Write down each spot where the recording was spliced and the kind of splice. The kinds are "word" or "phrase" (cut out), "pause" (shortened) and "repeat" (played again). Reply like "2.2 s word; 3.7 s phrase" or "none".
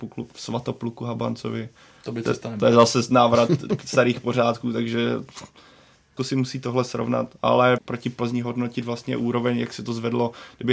6.2 s word; 7.8 s phrase